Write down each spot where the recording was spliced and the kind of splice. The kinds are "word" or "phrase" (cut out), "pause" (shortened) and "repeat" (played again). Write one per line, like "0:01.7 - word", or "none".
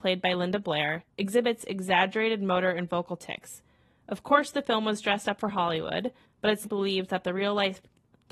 0:06.6 - word